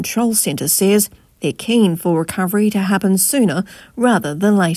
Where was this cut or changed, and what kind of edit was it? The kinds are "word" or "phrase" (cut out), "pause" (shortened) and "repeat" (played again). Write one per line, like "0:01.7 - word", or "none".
none